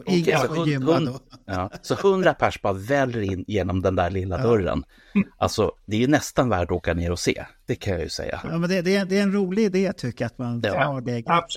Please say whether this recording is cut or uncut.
uncut